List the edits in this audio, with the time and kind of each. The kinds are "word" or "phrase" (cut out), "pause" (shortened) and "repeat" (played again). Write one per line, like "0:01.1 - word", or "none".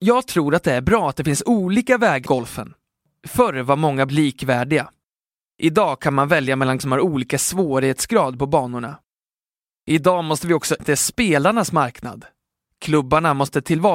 0:02.3 - word
0:04.1 - word
0:06.8 - word
0:10.8 - word